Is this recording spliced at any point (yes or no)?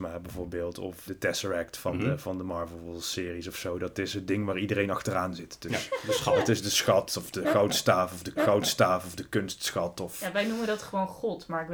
yes